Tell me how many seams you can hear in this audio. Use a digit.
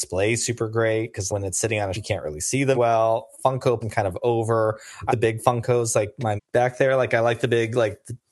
6